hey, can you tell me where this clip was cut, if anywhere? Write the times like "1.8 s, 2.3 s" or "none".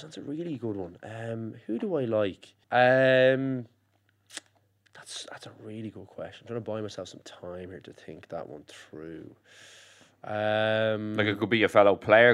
2.6 s